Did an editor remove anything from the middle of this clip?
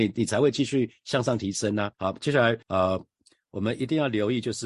yes; 2 cuts; at 1.9 s, 2.6 s

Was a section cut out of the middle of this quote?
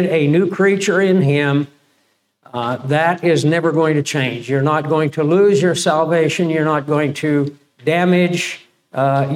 no; 0 cuts

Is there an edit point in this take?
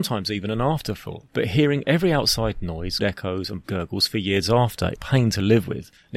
yes; 3 cuts; at 3.0 s, 3.6 s, 5.0 s

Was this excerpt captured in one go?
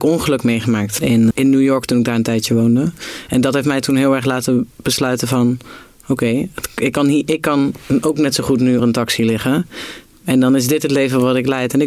no; 3 cuts; at 1.0 s, 1.3 s, 8.8 s

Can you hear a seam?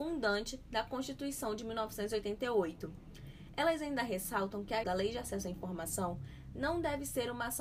yes; 1 cut; at 4.8 s

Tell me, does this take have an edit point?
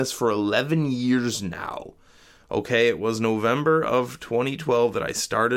no; 0 cuts

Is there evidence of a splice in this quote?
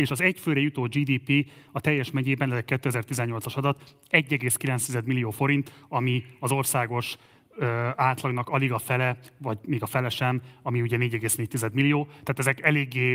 no; 0 cuts

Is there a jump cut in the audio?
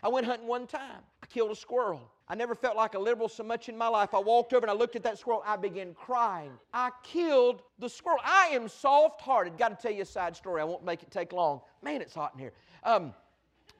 yes; 4 cuts; at 1.1 s, 2.2 s, 6.6 s, 7.7 s

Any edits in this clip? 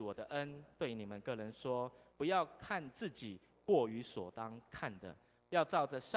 no; 0 cuts

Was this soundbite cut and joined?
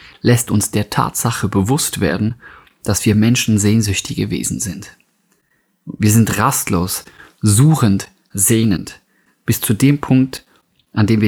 no; 0 cuts

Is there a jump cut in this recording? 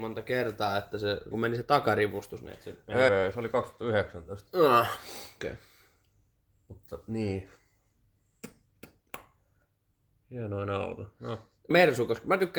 yes; 3 cuts; at 1.3 s, 3.1 s, 11.7 s

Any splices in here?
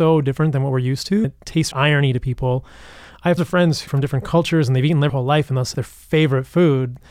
yes; 6 cuts; at 1.2 s, 1.7 s, 3.4 s, 3.9 s, 5.1 s, 5.7 s

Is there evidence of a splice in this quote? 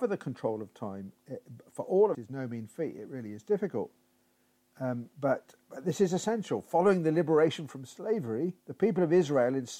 yes; 3 cuts; at 2.1 s, 5.1 s, 8.6 s

